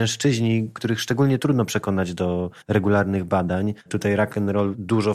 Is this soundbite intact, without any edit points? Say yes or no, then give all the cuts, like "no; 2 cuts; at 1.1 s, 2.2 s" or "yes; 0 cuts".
no; 2 cuts; at 2.6 s, 3.8 s